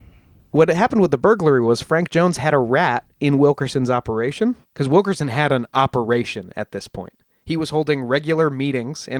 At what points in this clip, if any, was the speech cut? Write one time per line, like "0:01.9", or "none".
0:04.6